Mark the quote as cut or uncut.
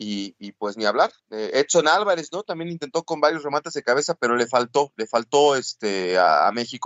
cut